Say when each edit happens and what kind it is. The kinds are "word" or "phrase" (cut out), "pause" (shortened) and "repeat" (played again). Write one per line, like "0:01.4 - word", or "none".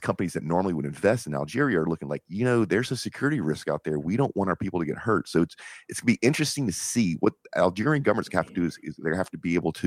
none